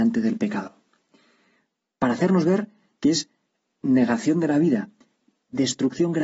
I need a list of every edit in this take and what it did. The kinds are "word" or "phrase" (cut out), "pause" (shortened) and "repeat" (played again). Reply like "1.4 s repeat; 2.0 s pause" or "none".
none